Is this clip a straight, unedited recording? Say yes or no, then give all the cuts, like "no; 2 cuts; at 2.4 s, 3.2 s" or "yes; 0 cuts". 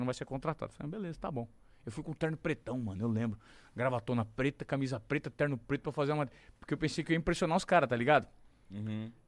yes; 0 cuts